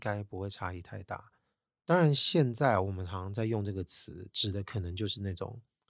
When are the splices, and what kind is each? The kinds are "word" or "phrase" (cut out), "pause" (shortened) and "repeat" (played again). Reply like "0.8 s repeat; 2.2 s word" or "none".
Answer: none